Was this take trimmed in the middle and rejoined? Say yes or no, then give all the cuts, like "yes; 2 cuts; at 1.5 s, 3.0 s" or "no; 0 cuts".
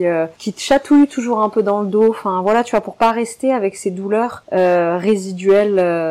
no; 0 cuts